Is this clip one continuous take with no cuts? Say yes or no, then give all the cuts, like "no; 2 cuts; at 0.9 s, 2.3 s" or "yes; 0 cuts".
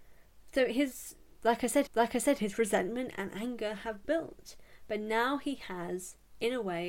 no; 1 cut; at 1.9 s